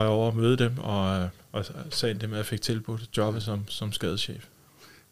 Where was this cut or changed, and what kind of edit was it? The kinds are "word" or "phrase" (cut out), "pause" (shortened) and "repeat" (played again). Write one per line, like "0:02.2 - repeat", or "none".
none